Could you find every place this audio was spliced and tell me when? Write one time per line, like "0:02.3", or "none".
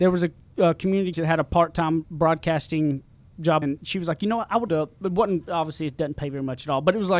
0:01.1
0:02.0
0:03.6
0:04.7